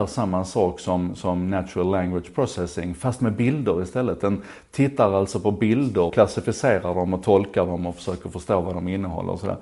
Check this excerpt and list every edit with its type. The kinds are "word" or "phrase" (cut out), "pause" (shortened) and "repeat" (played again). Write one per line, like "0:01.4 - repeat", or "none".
0:06.1 - word